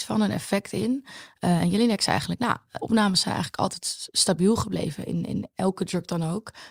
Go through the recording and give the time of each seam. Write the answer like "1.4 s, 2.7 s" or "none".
2.8 s